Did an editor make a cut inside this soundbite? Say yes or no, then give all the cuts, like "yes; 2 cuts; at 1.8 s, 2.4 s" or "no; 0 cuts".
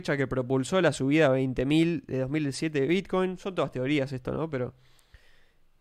no; 0 cuts